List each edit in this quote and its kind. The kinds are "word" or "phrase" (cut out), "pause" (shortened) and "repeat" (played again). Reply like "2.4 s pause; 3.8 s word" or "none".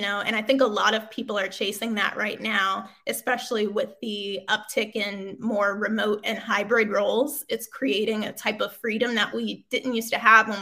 none